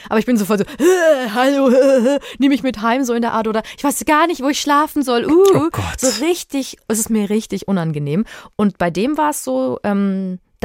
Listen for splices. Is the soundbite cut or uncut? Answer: uncut